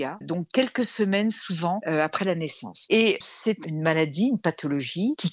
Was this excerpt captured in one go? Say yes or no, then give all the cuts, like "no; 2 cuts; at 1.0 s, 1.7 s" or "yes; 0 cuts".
no; 1 cut; at 3.2 s